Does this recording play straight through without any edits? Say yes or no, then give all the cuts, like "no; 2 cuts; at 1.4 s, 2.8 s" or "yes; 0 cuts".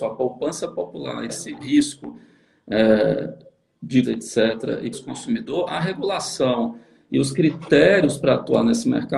no; 4 cuts; at 1.3 s, 1.6 s, 4.0 s, 4.9 s